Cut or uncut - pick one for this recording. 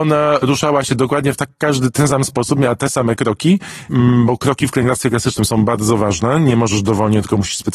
uncut